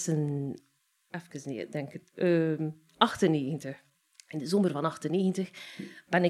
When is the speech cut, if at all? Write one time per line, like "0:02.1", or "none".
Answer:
none